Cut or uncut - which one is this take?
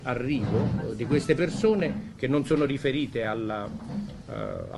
uncut